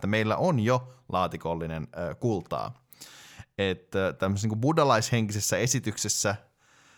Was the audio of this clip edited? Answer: no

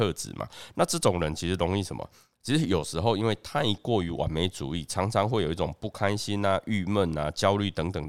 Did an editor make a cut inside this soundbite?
no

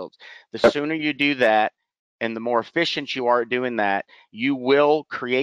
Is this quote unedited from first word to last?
yes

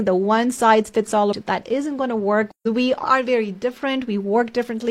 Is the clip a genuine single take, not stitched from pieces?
no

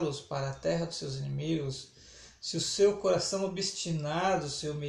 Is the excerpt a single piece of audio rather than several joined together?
yes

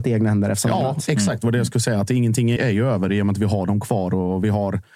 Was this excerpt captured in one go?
no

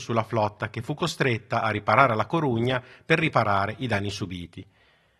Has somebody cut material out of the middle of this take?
no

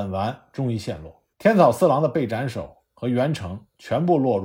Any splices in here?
yes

